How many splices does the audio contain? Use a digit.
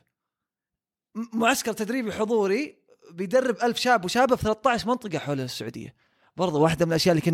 0